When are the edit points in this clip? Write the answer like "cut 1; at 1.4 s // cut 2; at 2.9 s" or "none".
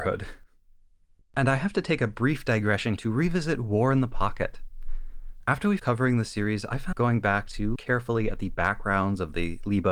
cut 1; at 3.0 s // cut 2; at 5.8 s // cut 3; at 6.9 s // cut 4; at 7.7 s